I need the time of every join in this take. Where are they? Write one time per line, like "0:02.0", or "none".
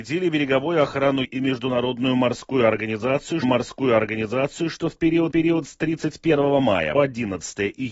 0:01.2
0:03.4
0:05.3
0:06.9